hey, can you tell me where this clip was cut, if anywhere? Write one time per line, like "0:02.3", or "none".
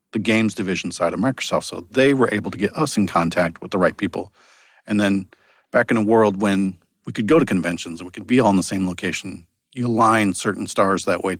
none